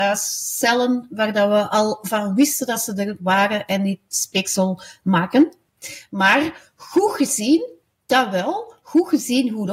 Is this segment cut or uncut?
uncut